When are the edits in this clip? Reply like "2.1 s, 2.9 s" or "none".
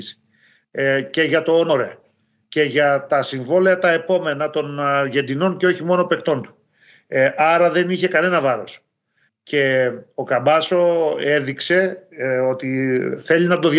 none

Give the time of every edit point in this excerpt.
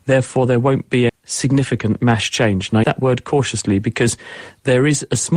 1.1 s, 2.8 s

